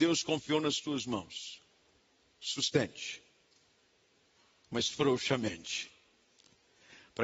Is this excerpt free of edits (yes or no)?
yes